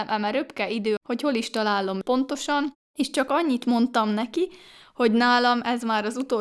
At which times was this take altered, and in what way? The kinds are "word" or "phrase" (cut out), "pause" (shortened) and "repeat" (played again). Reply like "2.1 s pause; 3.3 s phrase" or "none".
1.0 s phrase; 2.0 s word